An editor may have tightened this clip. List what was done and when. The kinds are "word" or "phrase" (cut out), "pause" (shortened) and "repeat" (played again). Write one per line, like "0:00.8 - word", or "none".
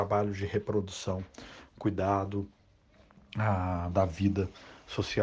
0:03.9 - word